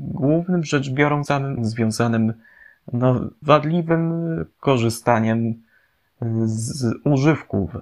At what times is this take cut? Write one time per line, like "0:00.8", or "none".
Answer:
0:01.3
0:01.6
0:03.4